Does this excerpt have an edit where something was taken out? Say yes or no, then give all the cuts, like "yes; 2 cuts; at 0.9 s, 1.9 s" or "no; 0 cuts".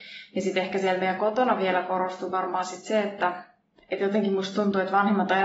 no; 0 cuts